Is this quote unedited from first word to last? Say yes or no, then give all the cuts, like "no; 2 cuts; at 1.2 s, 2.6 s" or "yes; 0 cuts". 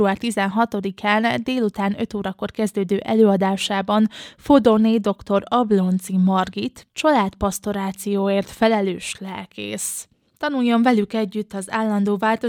yes; 0 cuts